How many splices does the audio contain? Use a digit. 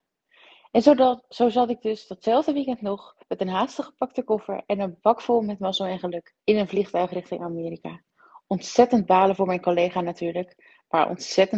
2